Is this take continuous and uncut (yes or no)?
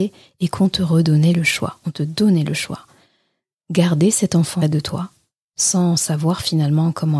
no